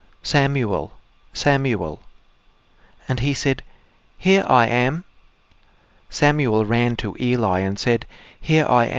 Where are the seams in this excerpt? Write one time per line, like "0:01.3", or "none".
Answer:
none